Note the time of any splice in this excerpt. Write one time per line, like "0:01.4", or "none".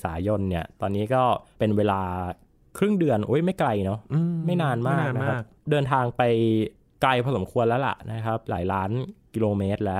none